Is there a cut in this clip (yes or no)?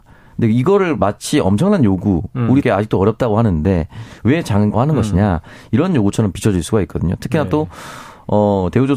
yes